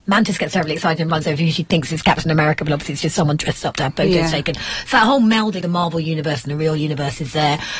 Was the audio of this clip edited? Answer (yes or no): yes